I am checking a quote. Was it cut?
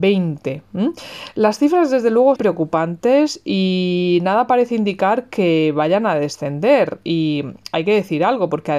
yes; 1 cut; at 2.4 s

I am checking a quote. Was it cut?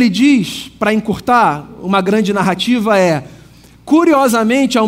no; 0 cuts

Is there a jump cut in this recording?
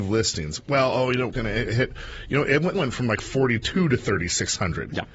yes; 3 cuts; at 1.3 s, 1.7 s, 2.7 s

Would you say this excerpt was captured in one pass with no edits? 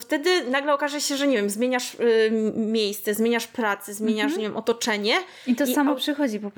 yes; 0 cuts

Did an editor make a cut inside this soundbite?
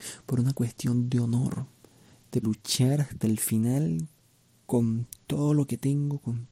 yes; 1 cut; at 2.4 s

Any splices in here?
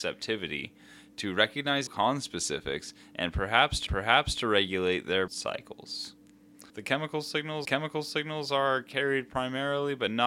yes; 5 cuts; at 1.9 s, 3.9 s, 5.3 s, 6.7 s, 7.6 s

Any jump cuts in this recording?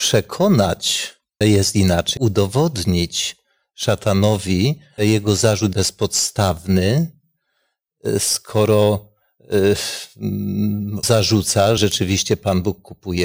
yes; 6 cuts; at 1.4 s, 2.2 s, 5.0 s, 5.7 s, 11.0 s, 11.8 s

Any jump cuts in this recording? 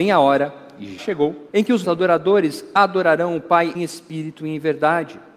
yes; 4 cuts; at 1.0 s, 1.5 s, 1.8 s, 3.7 s

